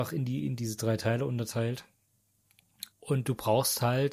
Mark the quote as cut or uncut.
cut